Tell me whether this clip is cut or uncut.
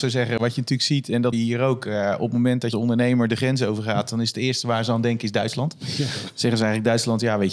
cut